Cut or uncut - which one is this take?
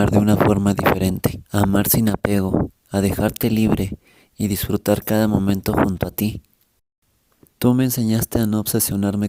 cut